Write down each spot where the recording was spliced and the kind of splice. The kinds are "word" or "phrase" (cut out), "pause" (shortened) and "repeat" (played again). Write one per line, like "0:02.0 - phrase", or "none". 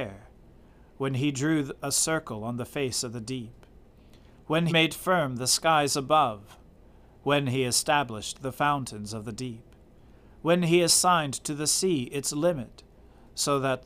0:04.7 - word